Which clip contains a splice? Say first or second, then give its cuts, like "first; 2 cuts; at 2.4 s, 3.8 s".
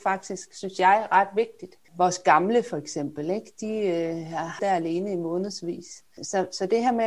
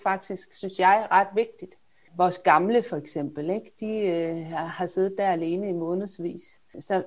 first; 2 cuts; at 1.8 s, 4.6 s